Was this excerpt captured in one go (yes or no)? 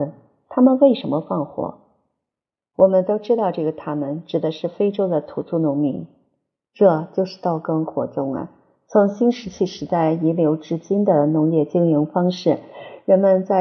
yes